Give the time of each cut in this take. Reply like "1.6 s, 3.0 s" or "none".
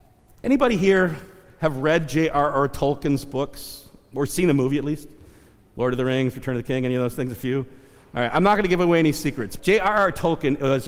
9.6 s